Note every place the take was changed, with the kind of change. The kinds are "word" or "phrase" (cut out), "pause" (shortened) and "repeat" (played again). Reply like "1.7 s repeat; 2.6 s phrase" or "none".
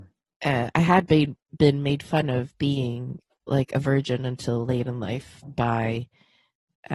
3.4 s word